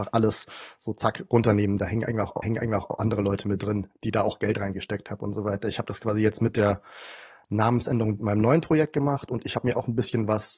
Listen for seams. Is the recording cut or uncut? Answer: cut